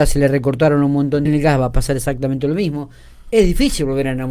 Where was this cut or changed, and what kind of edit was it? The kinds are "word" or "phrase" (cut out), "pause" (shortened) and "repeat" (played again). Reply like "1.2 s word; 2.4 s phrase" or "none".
1.3 s phrase